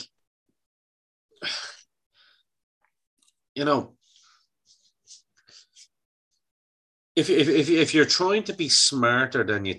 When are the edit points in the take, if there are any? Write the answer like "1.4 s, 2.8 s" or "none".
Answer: none